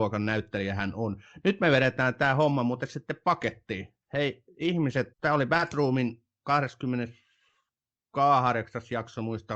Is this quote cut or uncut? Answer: cut